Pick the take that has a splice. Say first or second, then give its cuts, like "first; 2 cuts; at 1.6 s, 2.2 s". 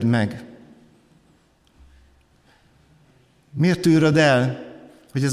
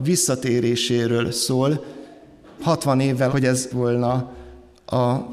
second; 3 cuts; at 2.6 s, 3.3 s, 3.7 s